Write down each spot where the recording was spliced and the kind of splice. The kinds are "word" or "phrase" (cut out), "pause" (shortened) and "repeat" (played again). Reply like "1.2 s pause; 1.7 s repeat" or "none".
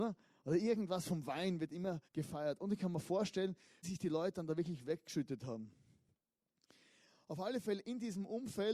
2.1 s pause; 3.8 s word